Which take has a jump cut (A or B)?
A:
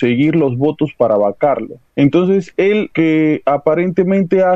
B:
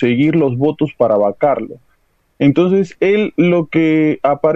A